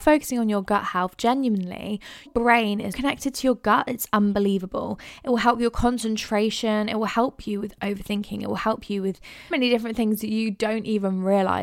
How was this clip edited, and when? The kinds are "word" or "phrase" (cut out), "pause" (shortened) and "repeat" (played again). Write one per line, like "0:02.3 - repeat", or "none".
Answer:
0:02.3 - word
0:02.9 - word
0:09.5 - word